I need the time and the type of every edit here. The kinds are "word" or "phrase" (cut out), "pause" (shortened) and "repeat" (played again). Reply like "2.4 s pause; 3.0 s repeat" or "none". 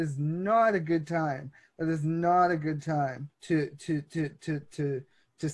3.3 s pause